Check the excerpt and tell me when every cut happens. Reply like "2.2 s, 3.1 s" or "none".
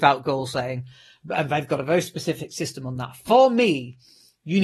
none

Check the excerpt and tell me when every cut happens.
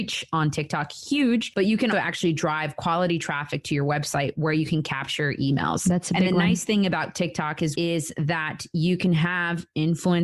1.9 s, 7.7 s

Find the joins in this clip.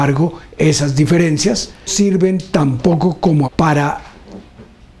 1.9 s, 3.4 s

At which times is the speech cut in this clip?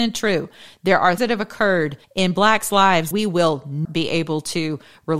1.2 s, 2.0 s, 3.1 s, 3.8 s

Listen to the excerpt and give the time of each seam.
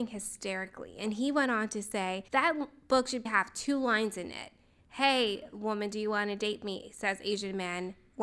2.3 s, 3.3 s

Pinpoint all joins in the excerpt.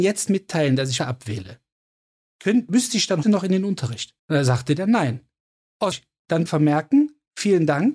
1.0 s, 3.2 s, 4.2 s, 5.9 s, 6.5 s

